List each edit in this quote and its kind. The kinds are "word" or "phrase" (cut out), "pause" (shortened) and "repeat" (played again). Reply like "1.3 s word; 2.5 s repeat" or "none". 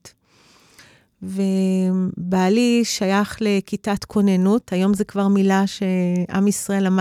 none